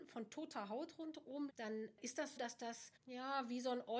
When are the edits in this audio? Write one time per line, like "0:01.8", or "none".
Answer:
0:01.5
0:02.4
0:03.0